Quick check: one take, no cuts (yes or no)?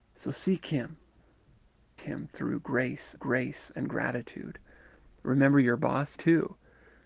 no